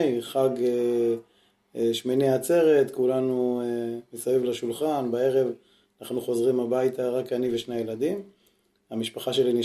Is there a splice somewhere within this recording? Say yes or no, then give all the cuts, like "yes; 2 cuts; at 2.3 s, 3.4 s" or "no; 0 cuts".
no; 0 cuts